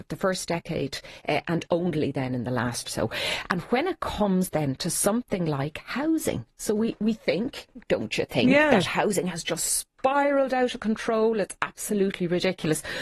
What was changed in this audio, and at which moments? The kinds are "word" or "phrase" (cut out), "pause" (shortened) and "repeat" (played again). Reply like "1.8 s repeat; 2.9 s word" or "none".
2.8 s phrase; 6.5 s pause